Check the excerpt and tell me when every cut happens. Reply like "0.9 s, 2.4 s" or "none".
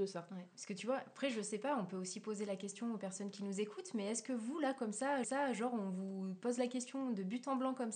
5.2 s